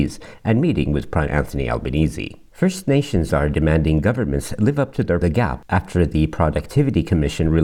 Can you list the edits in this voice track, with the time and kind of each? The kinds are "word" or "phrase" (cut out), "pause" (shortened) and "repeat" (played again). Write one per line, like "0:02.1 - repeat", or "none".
0:01.3 - word
0:02.5 - pause
0:03.3 - word
0:05.2 - phrase